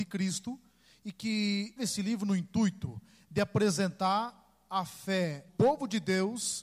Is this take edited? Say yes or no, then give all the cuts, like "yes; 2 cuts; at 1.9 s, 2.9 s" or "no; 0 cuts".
yes; 2 cuts; at 1.8 s, 5.5 s